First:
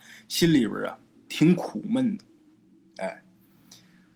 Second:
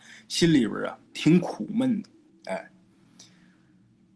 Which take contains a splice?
second; 2 cuts; at 1.1 s, 2.3 s

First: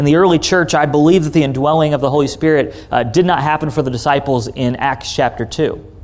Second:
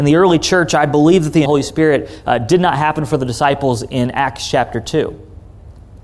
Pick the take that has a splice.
second; 1 cut; at 1.5 s

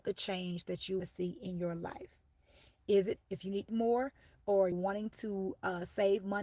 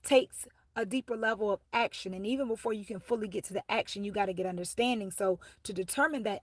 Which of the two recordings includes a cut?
first; 4 cuts; at 1.0 s, 3.2 s, 3.7 s, 4.7 s

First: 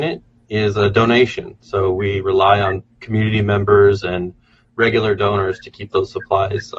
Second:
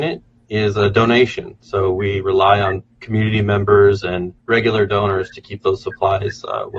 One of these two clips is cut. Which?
second; 1 cut; at 4.4 s

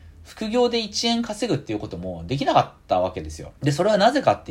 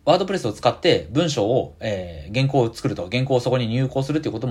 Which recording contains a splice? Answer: first; 1 cut; at 3.6 s

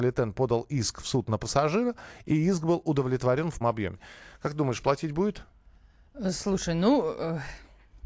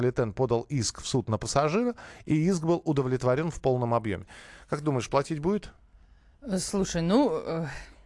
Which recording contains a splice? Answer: first; 1 cut; at 3.6 s

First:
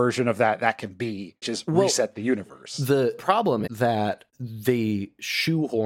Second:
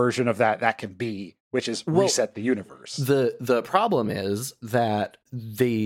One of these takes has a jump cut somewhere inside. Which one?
first; 3 cuts; at 1.4 s, 3.2 s, 3.7 s

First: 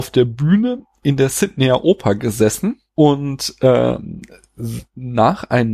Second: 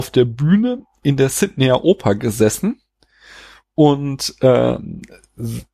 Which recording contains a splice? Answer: first; 1 cut; at 2.9 s

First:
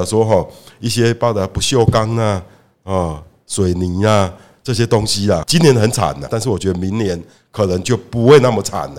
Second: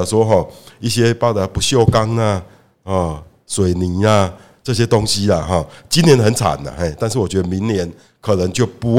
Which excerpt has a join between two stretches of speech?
first; 2 cuts; at 5.4 s, 6.3 s

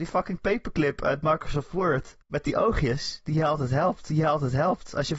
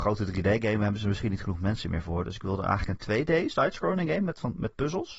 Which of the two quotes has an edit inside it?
first; 2 cuts; at 2.2 s, 4.1 s

